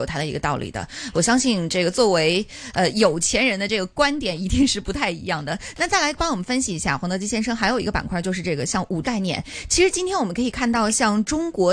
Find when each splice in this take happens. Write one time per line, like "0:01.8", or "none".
0:09.0